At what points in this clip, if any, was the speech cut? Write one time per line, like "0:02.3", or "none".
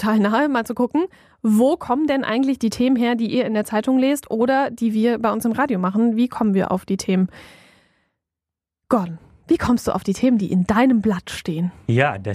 none